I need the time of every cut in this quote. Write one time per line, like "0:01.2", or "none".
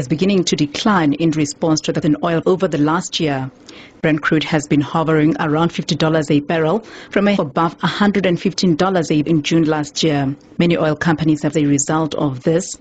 0:02.0
0:02.4
0:07.4
0:09.2
0:11.5